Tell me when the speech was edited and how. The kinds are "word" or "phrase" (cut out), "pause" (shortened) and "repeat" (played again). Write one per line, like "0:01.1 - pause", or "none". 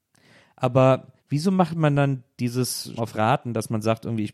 0:01.2 - pause
0:03.0 - word